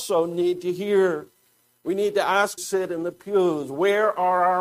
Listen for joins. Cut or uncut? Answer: cut